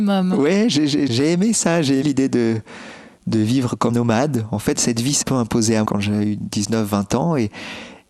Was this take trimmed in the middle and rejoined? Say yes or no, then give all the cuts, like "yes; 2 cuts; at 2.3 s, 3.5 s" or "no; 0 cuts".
yes; 6 cuts; at 1.1 s, 2.0 s, 3.9 s, 4.7 s, 5.2 s, 5.8 s